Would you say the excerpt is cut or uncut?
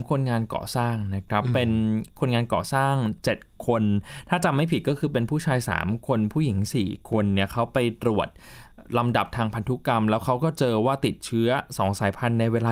cut